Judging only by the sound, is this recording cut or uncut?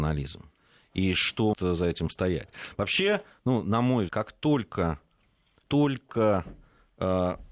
cut